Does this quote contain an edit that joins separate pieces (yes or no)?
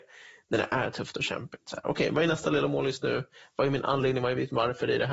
no